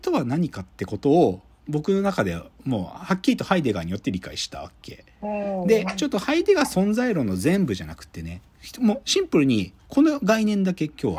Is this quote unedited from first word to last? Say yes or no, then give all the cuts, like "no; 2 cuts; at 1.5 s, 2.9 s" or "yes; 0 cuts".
no; 1 cut; at 9.8 s